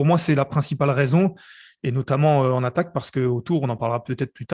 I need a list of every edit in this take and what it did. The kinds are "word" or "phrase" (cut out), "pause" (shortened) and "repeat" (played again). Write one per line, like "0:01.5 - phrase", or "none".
none